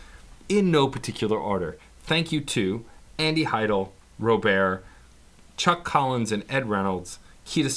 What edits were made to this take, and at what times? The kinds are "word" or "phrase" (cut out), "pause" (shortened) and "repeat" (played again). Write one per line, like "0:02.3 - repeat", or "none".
none